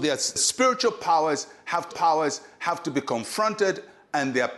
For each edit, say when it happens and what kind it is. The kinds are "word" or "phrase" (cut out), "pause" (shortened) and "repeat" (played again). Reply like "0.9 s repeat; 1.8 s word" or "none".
1.9 s repeat